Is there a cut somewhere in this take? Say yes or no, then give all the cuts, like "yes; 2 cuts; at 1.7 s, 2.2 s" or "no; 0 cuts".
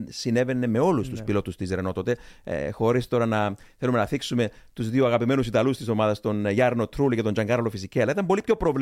no; 0 cuts